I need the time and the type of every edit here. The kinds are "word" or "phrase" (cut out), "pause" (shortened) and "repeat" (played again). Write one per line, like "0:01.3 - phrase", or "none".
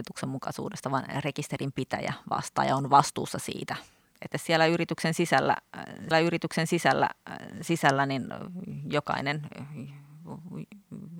0:04.3 - phrase
0:06.1 - repeat